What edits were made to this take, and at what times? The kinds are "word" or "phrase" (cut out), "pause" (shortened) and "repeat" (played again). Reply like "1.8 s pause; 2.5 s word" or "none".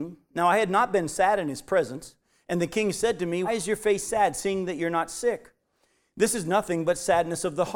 3.4 s word

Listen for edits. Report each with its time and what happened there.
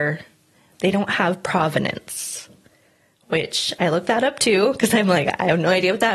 none

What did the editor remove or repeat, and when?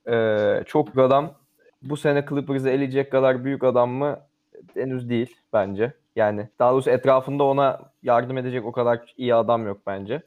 0.9 s word; 4.7 s pause; 6.5 s pause

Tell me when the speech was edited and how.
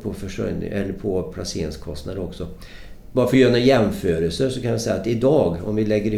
none

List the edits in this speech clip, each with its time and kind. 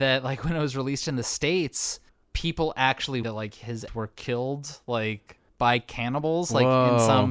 2.1 s pause; 3.2 s word; 3.9 s word; 5.5 s pause

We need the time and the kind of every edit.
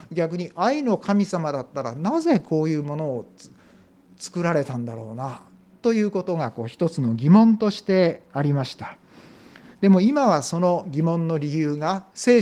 none

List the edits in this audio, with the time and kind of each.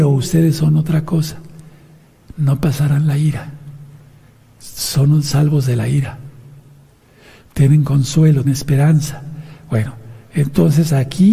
8.4 s word

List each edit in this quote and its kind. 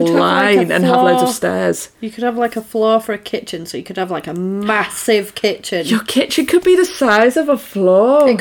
1.9 s pause

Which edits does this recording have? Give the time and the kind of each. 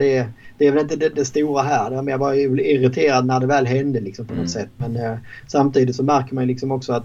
none

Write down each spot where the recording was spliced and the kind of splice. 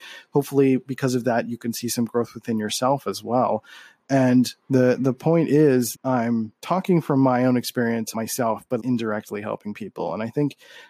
4.6 s pause; 5.9 s word; 6.6 s pause; 8.1 s phrase; 8.8 s word

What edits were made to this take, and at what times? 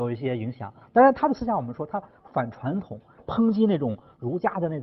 none

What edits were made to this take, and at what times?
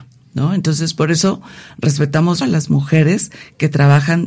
2.4 s word

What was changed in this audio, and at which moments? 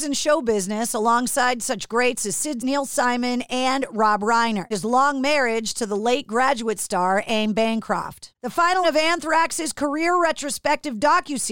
2.6 s word; 4.7 s word; 8.8 s word

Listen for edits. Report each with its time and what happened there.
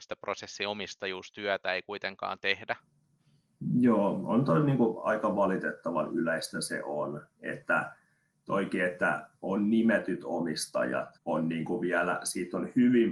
11.2 s pause

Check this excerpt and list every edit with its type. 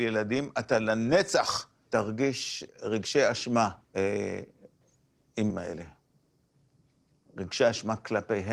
1.9 s word; 2.7 s word; 3.8 s pause; 5.5 s word

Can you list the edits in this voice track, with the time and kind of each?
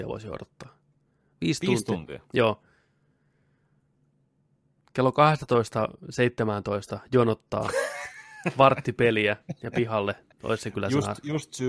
none

